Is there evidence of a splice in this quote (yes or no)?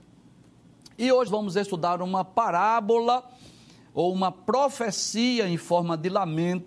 yes